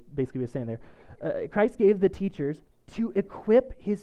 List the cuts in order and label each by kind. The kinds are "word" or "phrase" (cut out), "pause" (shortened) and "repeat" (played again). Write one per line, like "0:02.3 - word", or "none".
0:02.7 - pause